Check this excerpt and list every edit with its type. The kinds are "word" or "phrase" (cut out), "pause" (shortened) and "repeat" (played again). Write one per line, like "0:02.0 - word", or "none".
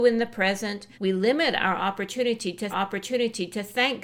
0:00.9 - pause
0:02.7 - repeat